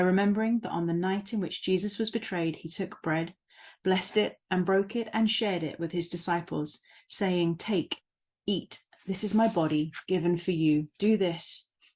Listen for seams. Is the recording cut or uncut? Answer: uncut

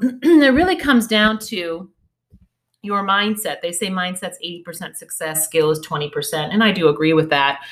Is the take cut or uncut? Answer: uncut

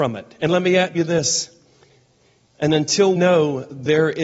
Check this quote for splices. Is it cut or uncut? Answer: cut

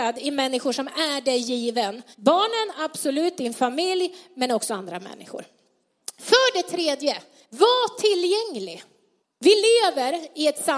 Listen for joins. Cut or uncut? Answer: cut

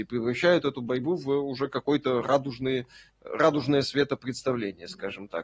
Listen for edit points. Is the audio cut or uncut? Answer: uncut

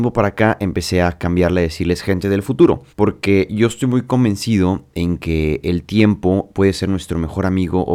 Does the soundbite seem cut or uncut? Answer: cut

